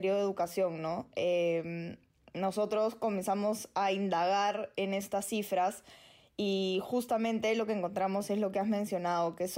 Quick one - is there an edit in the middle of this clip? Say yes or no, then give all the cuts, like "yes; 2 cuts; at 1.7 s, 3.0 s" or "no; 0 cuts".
no; 0 cuts